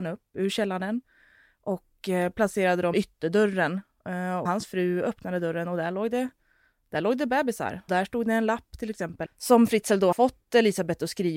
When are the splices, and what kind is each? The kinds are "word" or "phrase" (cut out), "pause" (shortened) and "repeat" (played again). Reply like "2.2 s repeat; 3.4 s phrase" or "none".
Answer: 2.9 s word; 4.5 s word; 7.9 s word; 9.3 s word; 10.1 s word